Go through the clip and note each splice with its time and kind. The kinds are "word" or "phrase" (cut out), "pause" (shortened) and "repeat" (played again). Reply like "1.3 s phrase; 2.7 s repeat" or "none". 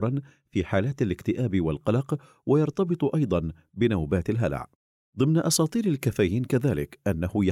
none